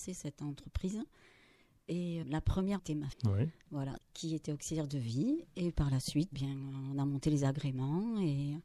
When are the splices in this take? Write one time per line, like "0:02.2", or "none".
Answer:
0:02.2
0:02.8
0:03.1
0:04.0
0:05.7
0:06.3